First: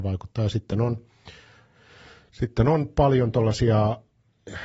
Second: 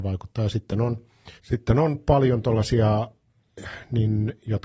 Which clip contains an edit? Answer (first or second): second